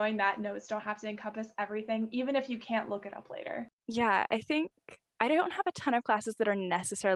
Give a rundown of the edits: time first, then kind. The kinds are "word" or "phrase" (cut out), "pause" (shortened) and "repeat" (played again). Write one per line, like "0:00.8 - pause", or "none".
0:03.8 - pause